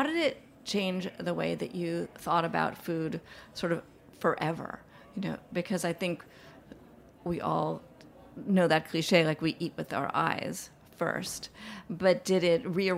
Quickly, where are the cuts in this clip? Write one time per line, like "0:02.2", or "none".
none